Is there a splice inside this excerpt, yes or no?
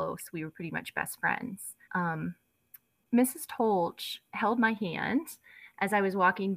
yes